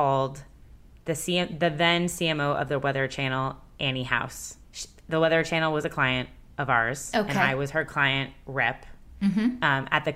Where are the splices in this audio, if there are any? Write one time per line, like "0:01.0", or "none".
0:04.6